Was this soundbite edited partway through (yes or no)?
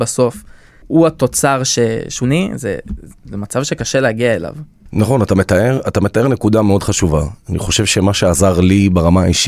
yes